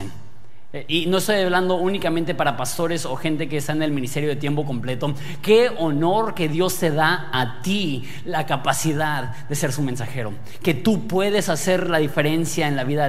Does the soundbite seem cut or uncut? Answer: uncut